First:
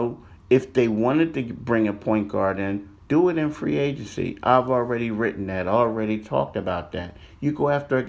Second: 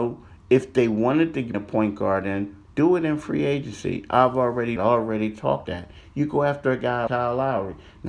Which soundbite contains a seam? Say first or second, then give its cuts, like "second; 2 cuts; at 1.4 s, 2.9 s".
second; 4 cuts; at 1.5 s, 4.8 s, 5.6 s, 7.1 s